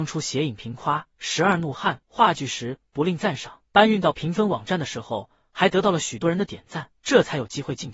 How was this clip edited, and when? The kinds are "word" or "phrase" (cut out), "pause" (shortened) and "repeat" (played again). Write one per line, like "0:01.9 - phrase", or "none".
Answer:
0:02.0 - pause
0:03.7 - pause
0:07.0 - pause